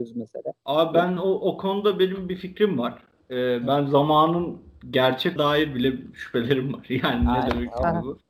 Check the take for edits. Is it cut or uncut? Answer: cut